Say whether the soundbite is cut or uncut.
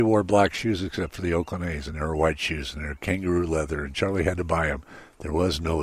uncut